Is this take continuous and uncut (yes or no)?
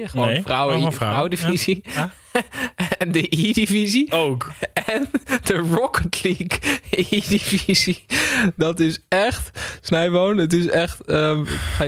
yes